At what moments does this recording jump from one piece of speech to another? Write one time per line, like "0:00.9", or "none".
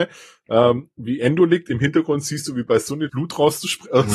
0:03.1